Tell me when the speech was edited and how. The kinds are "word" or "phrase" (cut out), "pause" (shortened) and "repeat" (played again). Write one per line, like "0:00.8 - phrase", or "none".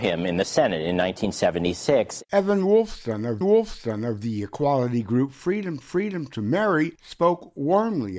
0:03.4 - repeat
0:05.8 - repeat